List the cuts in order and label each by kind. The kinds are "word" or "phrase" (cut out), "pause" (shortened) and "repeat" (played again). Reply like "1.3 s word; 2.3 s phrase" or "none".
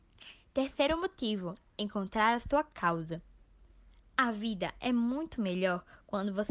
none